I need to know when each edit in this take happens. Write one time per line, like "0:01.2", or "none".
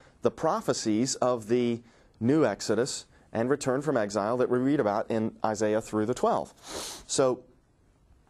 none